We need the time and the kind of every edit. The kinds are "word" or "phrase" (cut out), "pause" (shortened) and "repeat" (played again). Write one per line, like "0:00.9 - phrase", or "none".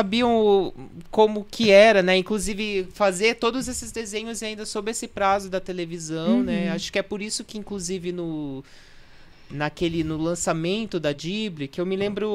none